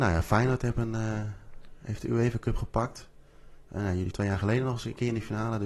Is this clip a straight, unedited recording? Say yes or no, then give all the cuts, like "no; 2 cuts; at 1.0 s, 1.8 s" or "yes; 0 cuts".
no; 1 cut; at 4.1 s